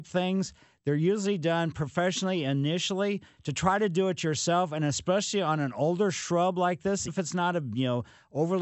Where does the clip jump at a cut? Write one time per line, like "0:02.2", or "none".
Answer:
0:07.1